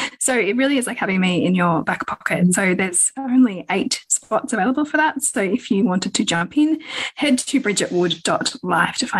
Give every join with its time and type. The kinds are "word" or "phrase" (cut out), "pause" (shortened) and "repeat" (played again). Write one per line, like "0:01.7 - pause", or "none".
none

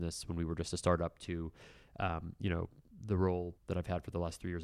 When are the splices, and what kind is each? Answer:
0:03.6 - pause

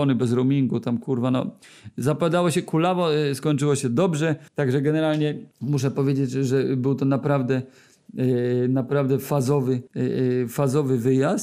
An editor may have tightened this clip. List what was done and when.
0:04.5 - pause
0:05.5 - pause
0:09.9 - pause

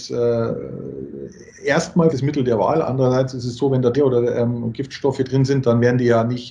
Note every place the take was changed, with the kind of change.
0:02.1 - word
0:03.9 - word

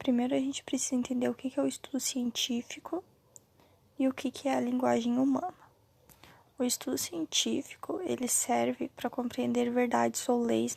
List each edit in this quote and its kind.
none

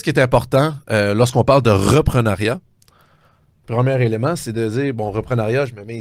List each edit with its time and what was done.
none

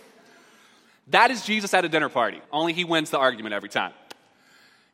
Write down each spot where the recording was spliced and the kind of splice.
0:02.4 - pause

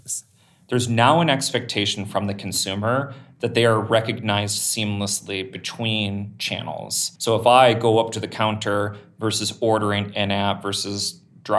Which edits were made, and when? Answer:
0:07.2 - pause

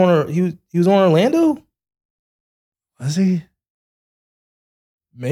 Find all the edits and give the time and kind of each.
none

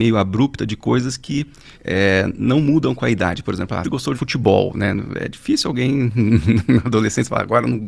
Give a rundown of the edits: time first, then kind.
0:01.7 - pause
0:03.8 - word
0:04.1 - word

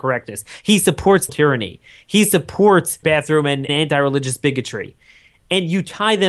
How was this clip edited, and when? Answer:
0:01.3 - word
0:03.0 - word
0:03.7 - word

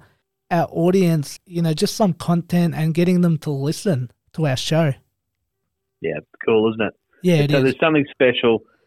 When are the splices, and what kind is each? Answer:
0:01.4 - word

